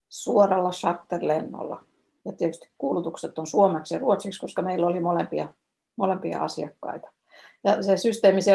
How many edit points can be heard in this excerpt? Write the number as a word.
zero